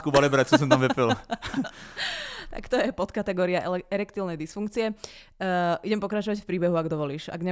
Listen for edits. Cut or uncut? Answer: uncut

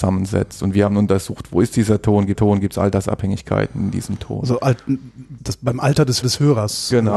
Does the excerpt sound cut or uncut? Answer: cut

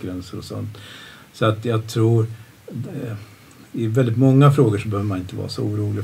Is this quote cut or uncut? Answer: uncut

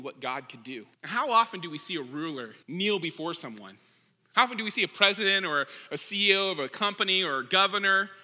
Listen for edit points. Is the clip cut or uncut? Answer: cut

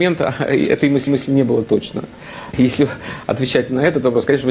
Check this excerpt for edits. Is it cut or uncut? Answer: cut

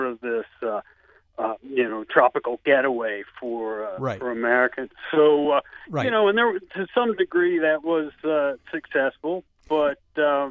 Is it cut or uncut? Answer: uncut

